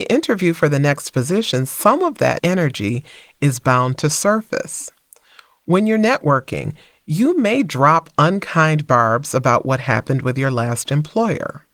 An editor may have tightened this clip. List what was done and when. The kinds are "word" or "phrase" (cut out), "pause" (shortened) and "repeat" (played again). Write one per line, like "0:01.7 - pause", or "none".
0:02.4 - word